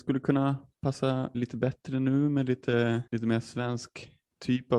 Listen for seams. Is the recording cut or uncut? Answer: cut